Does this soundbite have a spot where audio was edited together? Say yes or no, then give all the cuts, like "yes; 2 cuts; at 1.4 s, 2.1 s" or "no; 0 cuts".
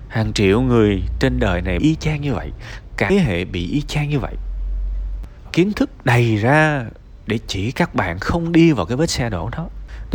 yes; 3 cuts; at 1.8 s, 3.1 s, 5.5 s